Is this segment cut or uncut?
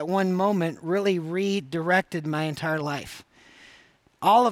uncut